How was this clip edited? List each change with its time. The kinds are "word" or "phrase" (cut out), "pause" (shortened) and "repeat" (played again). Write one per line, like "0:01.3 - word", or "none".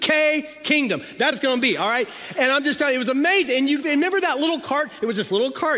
0:01.3 - word
0:03.8 - word